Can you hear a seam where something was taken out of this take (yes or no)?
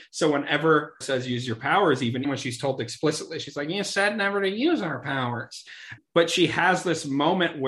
yes